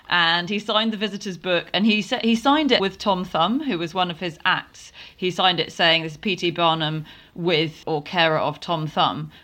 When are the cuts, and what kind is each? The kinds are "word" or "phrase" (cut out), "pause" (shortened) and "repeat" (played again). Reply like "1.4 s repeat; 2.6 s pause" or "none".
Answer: 2.8 s word; 7.8 s word